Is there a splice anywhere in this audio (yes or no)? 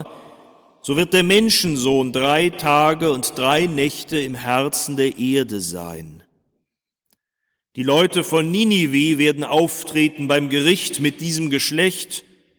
no